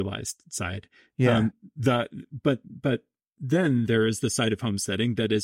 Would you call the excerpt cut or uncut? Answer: uncut